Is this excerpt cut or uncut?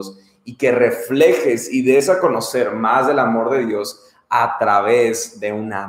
uncut